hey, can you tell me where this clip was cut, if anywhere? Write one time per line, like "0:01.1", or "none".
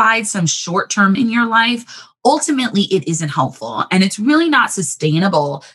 0:01.1